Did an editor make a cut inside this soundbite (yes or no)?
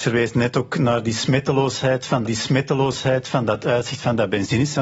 yes